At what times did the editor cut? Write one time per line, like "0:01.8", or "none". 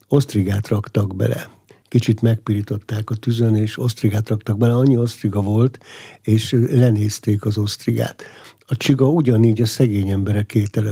none